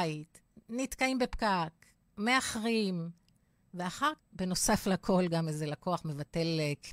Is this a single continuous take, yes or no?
no